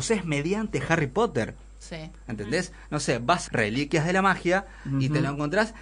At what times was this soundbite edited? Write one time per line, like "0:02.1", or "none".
0:03.5